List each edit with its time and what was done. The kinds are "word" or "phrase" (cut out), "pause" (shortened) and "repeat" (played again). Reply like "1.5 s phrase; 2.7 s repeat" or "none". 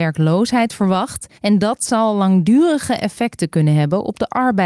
1.3 s pause